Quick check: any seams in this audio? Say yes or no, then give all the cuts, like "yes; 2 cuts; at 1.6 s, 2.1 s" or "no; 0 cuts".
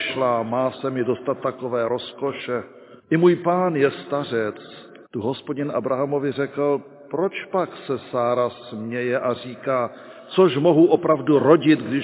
yes; 2 cuts; at 3.0 s, 5.1 s